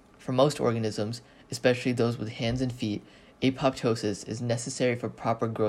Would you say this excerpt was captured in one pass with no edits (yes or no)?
yes